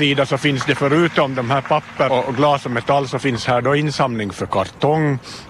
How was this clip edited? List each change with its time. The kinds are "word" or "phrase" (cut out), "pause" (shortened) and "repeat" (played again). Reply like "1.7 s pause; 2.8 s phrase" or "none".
2.1 s word